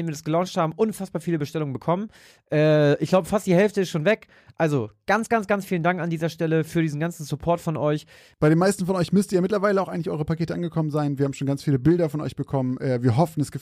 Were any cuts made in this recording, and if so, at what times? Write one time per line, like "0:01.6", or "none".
none